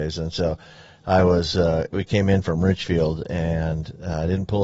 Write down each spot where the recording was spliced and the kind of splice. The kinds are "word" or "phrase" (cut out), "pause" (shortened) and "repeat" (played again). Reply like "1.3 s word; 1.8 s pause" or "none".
none